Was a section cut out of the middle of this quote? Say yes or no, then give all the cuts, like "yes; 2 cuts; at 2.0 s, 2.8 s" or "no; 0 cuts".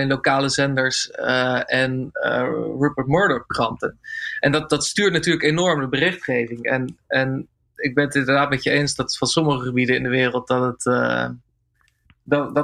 no; 0 cuts